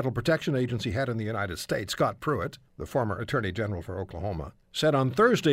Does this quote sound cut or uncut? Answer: cut